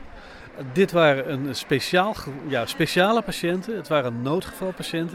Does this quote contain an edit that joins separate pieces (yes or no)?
no